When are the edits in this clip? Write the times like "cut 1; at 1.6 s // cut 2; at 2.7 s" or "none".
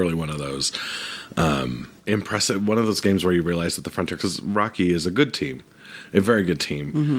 cut 1; at 2.0 s // cut 2; at 4.2 s